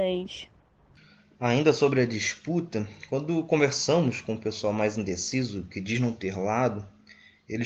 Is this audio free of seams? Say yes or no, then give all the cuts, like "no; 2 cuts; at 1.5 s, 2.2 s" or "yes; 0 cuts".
yes; 0 cuts